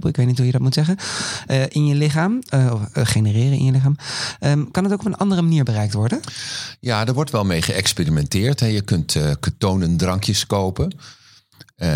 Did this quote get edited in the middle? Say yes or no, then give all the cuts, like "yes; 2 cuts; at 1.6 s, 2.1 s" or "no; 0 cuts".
no; 0 cuts